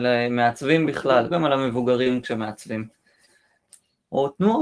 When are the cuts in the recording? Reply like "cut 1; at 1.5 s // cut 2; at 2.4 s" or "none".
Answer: cut 1; at 1.3 s